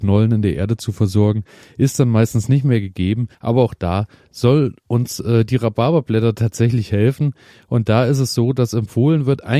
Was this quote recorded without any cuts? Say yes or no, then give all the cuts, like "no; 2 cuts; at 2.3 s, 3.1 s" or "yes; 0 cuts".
no; 1 cut; at 3.3 s